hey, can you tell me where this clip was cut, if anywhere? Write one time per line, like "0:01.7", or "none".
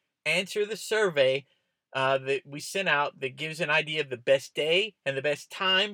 none